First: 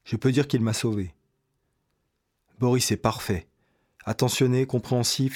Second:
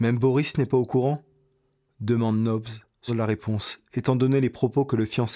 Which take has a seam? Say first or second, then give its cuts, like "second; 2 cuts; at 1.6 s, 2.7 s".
second; 1 cut; at 3.1 s